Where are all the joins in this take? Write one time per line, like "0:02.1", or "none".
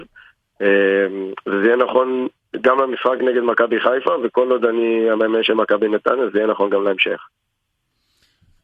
none

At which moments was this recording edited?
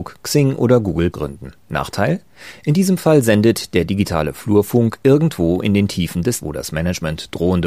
0:01.1
0:01.6
0:06.4

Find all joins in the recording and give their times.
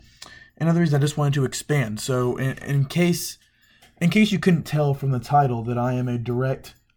none

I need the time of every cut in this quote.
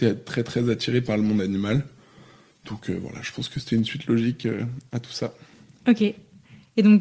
none

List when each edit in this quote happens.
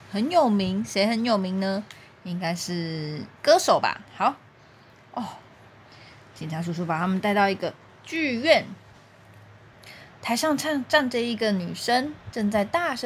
0:03.3
0:04.1
0:07.9

